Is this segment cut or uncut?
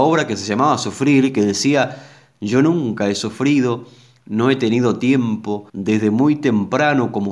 cut